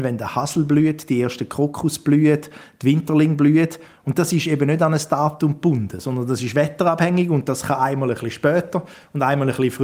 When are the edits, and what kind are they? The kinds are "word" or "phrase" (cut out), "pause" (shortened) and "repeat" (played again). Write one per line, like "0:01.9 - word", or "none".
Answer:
none